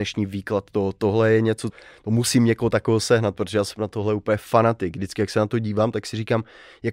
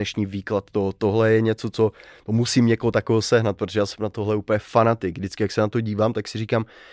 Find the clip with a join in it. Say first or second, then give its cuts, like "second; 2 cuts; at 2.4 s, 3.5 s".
first; 1 cut; at 1.7 s